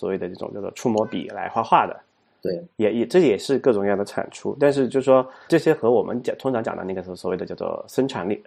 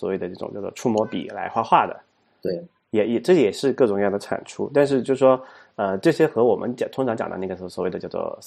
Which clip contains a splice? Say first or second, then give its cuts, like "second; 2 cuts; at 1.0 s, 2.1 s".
first; 2 cuts; at 2.7 s, 5.5 s